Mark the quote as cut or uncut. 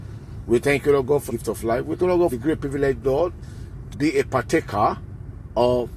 cut